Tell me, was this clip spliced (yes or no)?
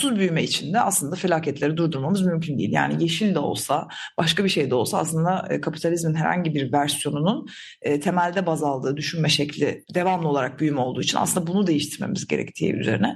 no